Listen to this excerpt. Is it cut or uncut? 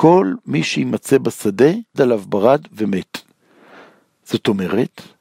cut